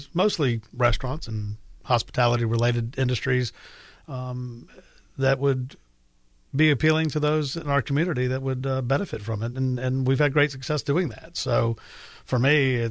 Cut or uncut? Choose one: uncut